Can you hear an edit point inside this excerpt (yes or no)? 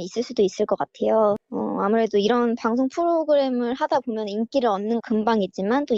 yes